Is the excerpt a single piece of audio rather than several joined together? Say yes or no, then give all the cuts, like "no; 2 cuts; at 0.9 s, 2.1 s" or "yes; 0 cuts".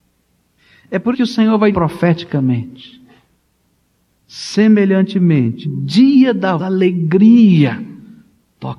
no; 4 cuts; at 1.1 s, 1.7 s, 5.6 s, 6.6 s